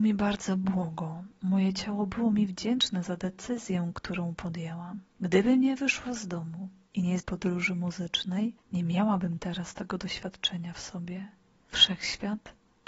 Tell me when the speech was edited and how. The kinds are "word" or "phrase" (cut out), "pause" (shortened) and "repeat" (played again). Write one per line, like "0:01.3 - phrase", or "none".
0:05.1 - pause
0:07.2 - phrase